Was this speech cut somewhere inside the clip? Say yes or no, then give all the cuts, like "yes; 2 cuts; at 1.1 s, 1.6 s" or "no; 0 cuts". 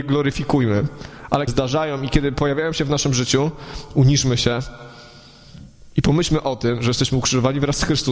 yes; 1 cut; at 1.5 s